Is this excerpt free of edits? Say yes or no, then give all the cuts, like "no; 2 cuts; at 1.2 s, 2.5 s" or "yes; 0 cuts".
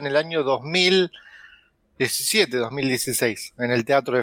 yes; 0 cuts